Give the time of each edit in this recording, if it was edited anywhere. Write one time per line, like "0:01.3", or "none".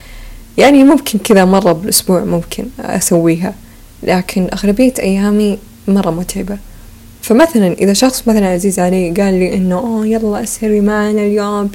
none